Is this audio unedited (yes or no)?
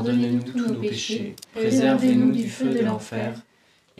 no